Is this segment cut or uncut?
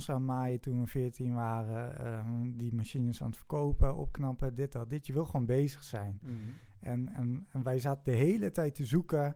uncut